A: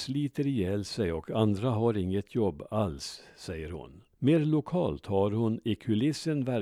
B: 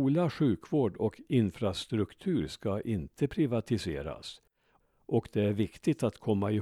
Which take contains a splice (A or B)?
A